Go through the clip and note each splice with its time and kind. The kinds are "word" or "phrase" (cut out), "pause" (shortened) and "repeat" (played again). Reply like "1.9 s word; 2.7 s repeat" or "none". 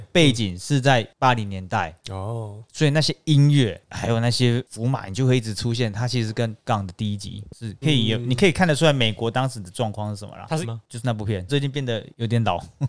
6.6 s word; 7.8 s word; 10.6 s word; 11.5 s phrase